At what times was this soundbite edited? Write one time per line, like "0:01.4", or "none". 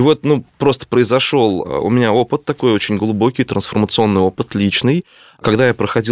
none